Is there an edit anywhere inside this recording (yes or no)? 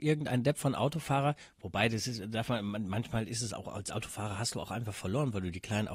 no